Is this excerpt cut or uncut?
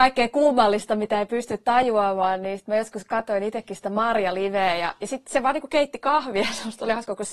uncut